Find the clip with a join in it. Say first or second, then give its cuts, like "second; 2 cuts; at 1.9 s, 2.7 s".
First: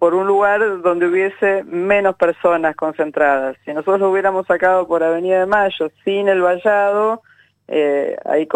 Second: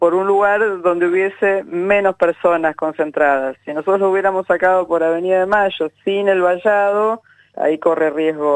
second; 1 cut; at 7.5 s